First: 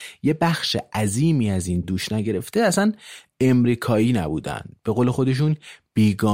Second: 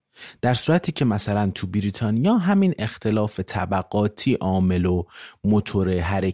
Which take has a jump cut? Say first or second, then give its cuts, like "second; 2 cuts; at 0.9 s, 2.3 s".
first; 1 cut; at 1.8 s